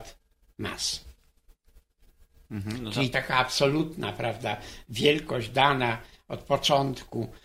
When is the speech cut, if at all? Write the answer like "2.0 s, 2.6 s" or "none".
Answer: 3.1 s